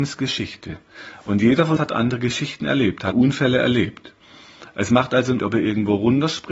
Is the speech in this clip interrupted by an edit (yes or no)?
yes